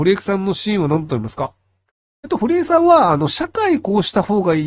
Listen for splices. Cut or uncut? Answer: uncut